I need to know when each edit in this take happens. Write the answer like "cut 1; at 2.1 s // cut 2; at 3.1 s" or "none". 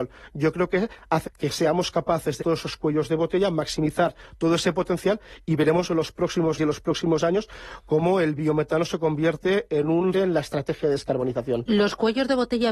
cut 1; at 1.2 s // cut 2; at 2.4 s // cut 3; at 6.6 s // cut 4; at 10.1 s